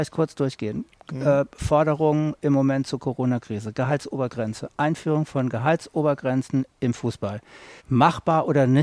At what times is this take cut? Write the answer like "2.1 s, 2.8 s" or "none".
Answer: 7.8 s